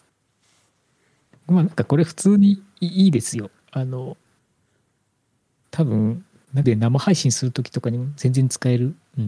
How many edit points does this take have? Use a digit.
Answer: 1